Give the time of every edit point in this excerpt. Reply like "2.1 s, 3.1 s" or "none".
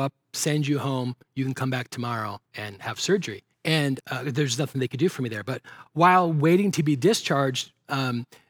2.5 s, 3.5 s